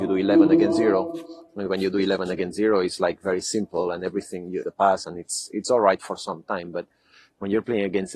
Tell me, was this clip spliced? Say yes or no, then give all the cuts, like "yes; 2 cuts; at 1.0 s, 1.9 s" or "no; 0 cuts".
yes; 1 cut; at 4.6 s